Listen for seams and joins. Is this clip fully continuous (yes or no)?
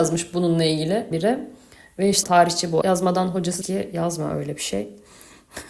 no